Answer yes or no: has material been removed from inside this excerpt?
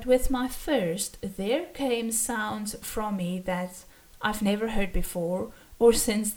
no